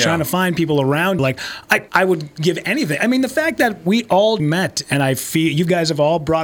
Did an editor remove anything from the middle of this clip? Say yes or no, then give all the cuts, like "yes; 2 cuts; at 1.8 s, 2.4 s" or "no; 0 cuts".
yes; 3 cuts; at 1.2 s, 1.9 s, 4.4 s